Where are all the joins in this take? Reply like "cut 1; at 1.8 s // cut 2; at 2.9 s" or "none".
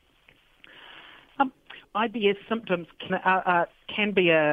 cut 1; at 1.8 s // cut 2; at 3.1 s